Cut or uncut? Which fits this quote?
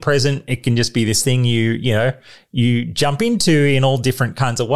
uncut